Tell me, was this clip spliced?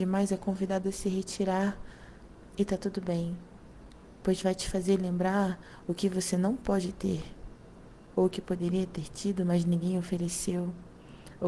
no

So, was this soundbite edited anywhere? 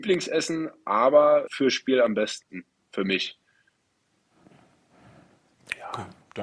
yes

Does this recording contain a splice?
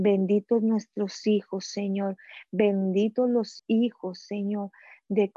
yes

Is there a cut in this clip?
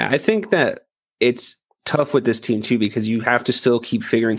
no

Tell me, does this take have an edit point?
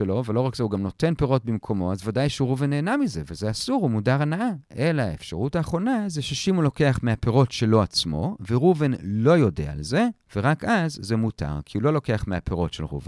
no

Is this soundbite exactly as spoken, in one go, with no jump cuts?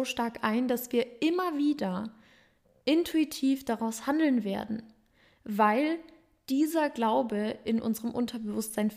yes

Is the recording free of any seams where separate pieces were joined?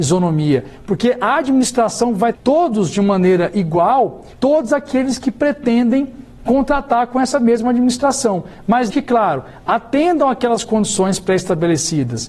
no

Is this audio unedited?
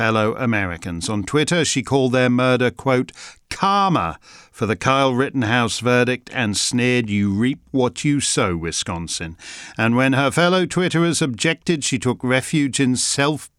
yes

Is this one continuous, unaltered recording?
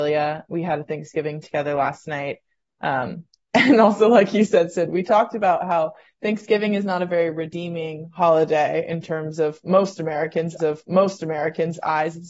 no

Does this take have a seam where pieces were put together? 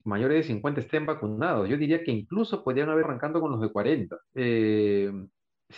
yes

